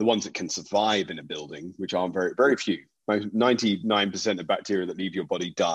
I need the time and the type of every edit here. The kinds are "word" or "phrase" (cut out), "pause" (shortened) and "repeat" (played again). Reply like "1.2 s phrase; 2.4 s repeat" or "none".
none